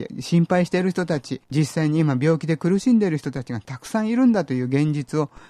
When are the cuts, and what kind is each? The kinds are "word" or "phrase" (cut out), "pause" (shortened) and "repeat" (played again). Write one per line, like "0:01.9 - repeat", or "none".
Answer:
0:01.4 - pause